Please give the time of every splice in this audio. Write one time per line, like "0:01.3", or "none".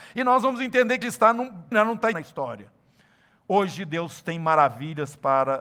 0:01.0
0:01.7
0:02.1